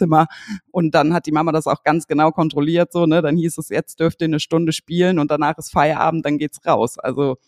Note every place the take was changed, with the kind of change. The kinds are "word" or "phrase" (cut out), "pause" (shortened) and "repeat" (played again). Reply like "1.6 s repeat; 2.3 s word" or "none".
none